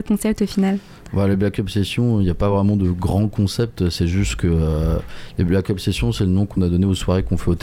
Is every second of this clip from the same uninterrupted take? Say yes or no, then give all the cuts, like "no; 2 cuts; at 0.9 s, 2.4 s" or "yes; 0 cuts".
yes; 0 cuts